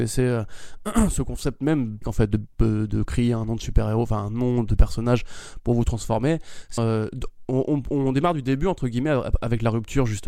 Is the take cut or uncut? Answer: cut